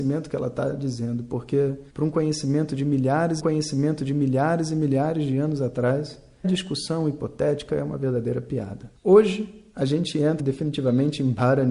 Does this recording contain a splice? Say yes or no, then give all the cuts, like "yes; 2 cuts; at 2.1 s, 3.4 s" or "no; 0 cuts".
yes; 6 cuts; at 1.9 s, 3.4 s, 6.4 s, 7.7 s, 9.0 s, 10.4 s